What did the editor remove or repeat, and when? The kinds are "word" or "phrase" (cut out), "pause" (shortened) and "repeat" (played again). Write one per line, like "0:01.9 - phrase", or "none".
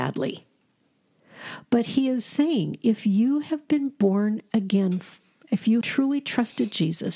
0:05.8 - word